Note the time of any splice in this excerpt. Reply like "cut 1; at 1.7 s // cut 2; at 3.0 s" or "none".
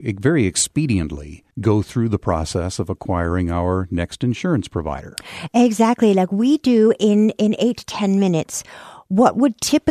cut 1; at 1.5 s